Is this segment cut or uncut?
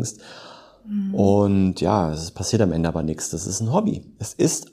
uncut